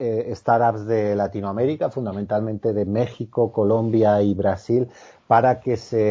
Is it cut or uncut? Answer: uncut